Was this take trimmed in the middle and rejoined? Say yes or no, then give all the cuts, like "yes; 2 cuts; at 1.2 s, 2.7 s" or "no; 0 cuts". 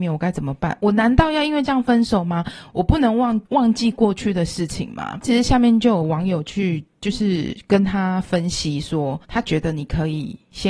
yes; 2 cuts; at 3.4 s, 9.2 s